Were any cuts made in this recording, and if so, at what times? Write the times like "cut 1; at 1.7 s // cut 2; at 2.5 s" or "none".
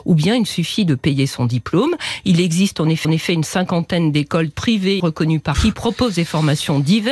cut 1; at 3.0 s // cut 2; at 4.5 s // cut 3; at 5.0 s // cut 4; at 5.5 s